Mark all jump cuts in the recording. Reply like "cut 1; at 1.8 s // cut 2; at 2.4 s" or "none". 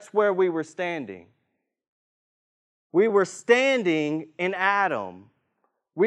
none